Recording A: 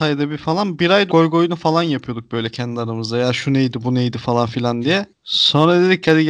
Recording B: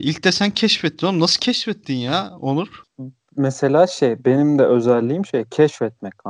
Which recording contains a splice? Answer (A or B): A